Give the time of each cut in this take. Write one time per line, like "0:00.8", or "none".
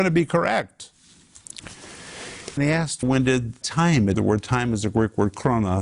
0:02.6
0:03.0
0:03.6
0:04.1